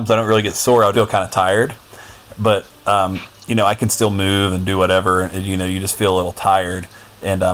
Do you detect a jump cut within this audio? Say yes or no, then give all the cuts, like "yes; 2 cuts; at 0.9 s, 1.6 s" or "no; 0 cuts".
yes; 1 cut; at 0.9 s